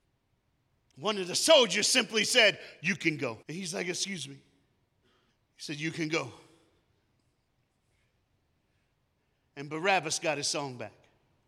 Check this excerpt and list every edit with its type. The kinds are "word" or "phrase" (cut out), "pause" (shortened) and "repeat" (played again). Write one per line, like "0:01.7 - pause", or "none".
0:03.4 - pause
0:05.3 - pause

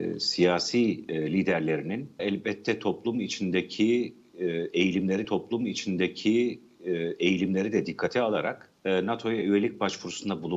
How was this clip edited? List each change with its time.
0:02.2 - phrase
0:05.2 - repeat
0:08.8 - pause

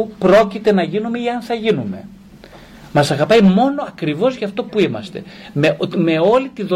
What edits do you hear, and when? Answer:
none

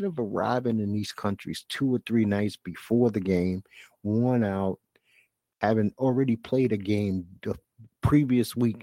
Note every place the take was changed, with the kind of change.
none

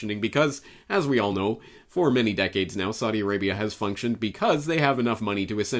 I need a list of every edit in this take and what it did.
none

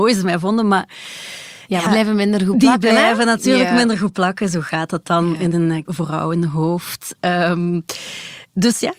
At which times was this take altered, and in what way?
0:01.9 - word
0:05.8 - word

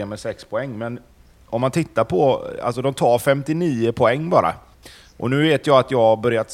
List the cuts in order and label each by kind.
none

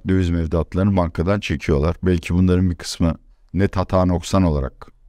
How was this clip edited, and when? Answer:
0:03.3 - pause

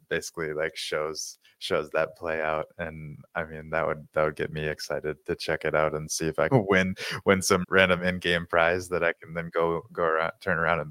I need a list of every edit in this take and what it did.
0:05.2 - word
0:06.5 - word
0:07.6 - word

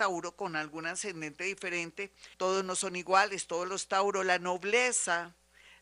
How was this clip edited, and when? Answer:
0:02.3 - pause

